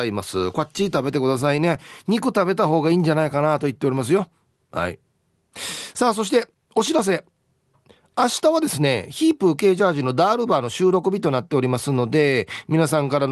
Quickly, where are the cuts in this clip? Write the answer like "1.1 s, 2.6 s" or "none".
none